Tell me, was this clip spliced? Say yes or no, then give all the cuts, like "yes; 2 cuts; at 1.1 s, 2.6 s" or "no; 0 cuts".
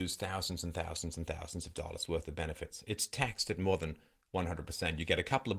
no; 0 cuts